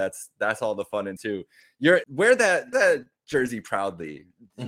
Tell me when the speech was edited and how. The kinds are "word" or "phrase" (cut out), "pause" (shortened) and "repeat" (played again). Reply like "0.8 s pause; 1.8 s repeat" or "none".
1.2 s word; 2.0 s word; 2.7 s word